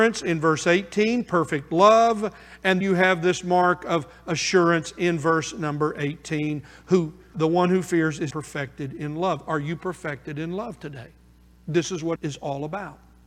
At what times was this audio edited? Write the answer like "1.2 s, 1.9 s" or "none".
2.8 s, 7.3 s, 8.3 s, 12.2 s